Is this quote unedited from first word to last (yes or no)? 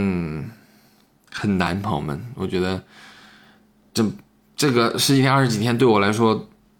yes